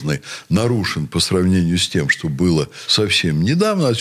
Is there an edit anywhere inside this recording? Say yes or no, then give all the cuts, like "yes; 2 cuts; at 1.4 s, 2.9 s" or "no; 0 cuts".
no; 0 cuts